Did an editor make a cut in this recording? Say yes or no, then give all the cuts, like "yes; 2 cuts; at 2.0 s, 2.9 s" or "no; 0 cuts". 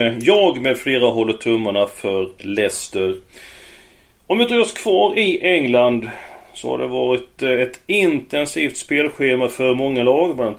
no; 0 cuts